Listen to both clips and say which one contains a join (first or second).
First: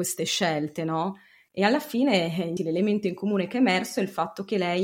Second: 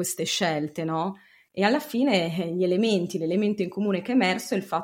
first